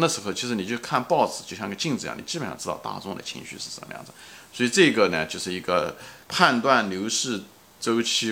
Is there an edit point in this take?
yes; 1 cut; at 6.2 s

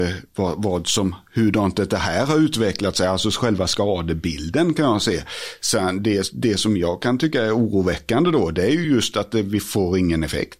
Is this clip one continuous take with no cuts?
yes; 0 cuts

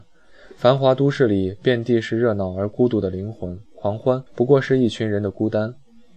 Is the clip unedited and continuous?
no; 2 cuts; at 3.7 s, 4.3 s

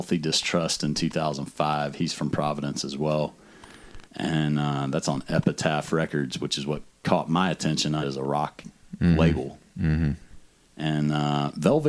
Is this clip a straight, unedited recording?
no; 2 cuts; at 4.0 s, 8.0 s

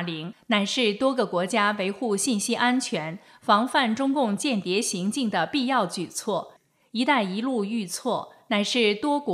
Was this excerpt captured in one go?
yes; 0 cuts

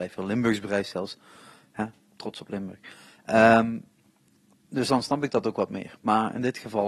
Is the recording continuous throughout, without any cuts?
yes; 0 cuts

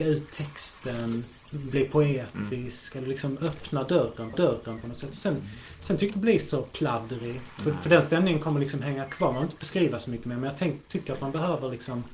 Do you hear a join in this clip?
yes; 3 cuts; at 1.4 s, 4.3 s, 6.1 s

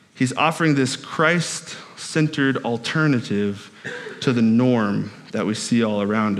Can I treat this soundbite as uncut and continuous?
yes; 0 cuts

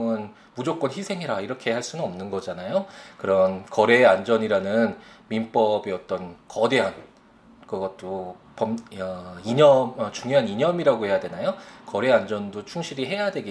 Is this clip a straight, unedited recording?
yes; 0 cuts

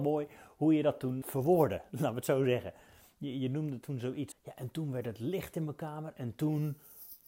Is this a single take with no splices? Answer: no; 2 cuts; at 1.2 s, 4.3 s

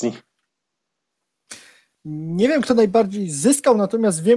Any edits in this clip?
no; 0 cuts

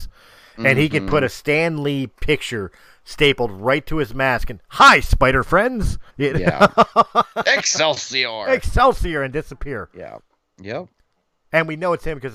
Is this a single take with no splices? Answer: no; 3 cuts; at 2.1 s, 6.1 s, 10.4 s

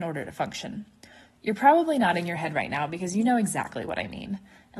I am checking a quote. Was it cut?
no; 0 cuts

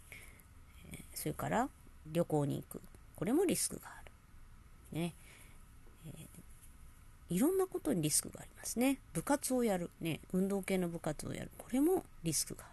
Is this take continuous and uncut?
no; 2 cuts; at 2.1 s, 9.9 s

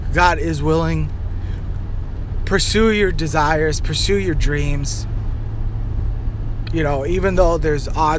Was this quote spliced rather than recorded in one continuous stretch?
no; 0 cuts

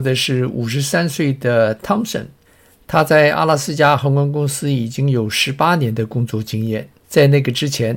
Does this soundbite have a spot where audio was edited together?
yes; 3 cuts; at 1.8 s, 2.5 s, 7.0 s

